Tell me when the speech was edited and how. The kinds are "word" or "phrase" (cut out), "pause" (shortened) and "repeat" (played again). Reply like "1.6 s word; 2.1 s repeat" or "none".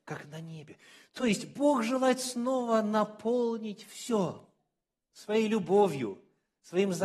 none